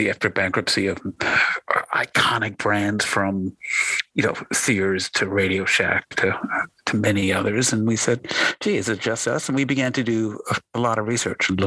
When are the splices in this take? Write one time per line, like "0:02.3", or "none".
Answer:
none